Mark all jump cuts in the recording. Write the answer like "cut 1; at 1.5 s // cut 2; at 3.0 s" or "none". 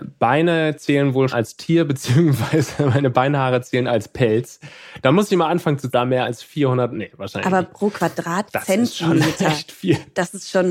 cut 1; at 1.3 s // cut 2; at 5.9 s